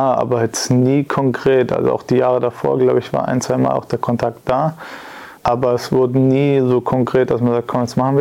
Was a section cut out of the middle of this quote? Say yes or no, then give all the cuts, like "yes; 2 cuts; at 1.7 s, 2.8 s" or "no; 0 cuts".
yes; 1 cut; at 5.4 s